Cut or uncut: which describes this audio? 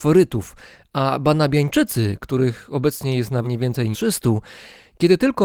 cut